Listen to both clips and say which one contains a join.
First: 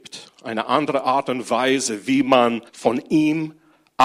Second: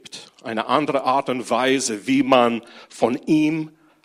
first; 1 cut; at 2.7 s

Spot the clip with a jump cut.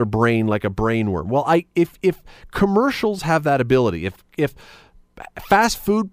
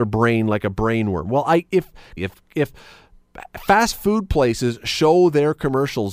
second; 2 cuts; at 1.7 s, 2.2 s

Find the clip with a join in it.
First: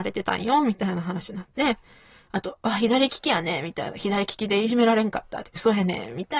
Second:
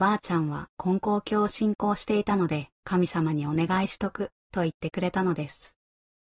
second; 1 cut; at 2.7 s

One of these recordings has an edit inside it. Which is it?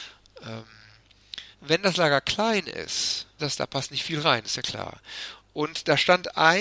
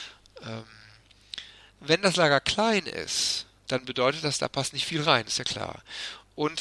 first; 2 cuts; at 1.5 s, 3.4 s

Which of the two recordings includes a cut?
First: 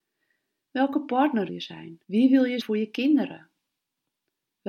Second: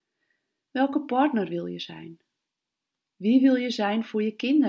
first; 3 cuts; at 1.5 s, 2.0 s, 2.6 s

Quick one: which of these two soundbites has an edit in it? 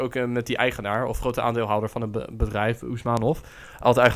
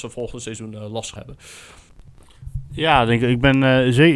second; 1 cut; at 1.2 s

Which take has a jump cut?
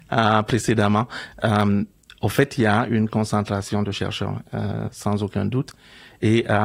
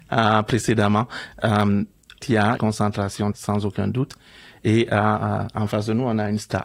second; 3 cuts; at 2.2 s, 2.6 s, 3.3 s

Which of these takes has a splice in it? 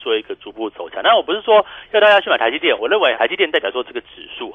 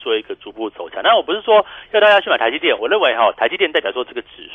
first; 1 cut; at 3.1 s

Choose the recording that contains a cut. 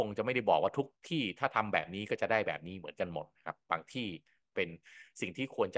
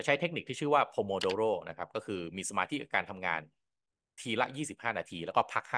first; 1 cut; at 1.0 s

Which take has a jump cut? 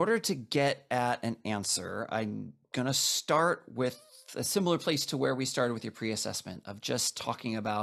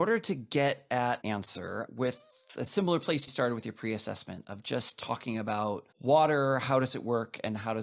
second; 4 cuts; at 1.2 s, 1.9 s, 3.3 s, 5.9 s

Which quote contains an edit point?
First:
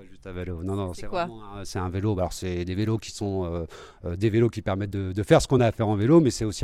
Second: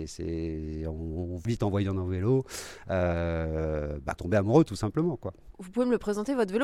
second; 3 cuts; at 1.5 s, 4.2 s, 5.5 s

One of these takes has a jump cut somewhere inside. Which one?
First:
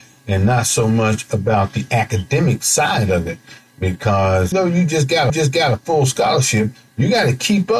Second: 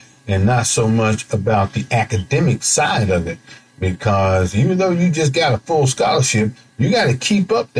first; 2 cuts; at 4.5 s, 5.3 s

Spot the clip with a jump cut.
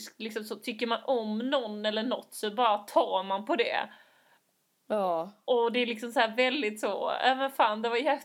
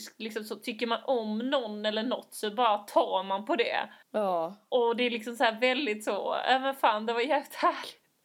second; 1 cut; at 4.0 s

